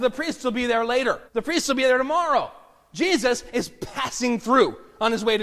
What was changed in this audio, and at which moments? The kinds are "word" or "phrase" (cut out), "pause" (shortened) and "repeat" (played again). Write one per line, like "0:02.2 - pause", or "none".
0:01.3 - pause